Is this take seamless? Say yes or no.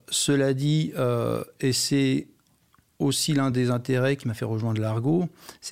yes